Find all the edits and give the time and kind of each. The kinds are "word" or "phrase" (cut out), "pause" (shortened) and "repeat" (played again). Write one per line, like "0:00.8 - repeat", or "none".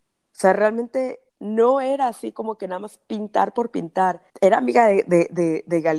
0:01.3 - pause
0:04.3 - pause